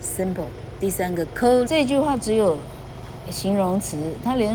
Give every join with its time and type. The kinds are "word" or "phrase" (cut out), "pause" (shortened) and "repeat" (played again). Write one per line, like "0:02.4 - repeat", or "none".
0:01.7 - phrase